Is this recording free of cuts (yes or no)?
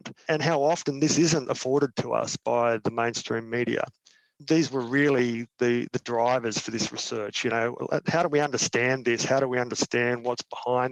yes